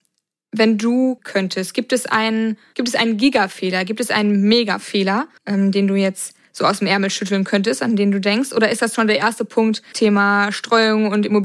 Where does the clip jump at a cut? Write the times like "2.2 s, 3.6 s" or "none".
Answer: 1.2 s, 5.4 s, 8.9 s, 9.9 s